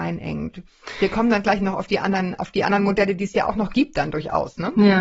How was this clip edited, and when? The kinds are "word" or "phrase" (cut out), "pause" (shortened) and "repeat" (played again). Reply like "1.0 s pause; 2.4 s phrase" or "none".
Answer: none